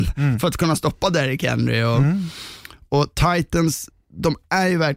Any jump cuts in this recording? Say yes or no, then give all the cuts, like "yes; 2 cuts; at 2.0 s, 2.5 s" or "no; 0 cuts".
no; 0 cuts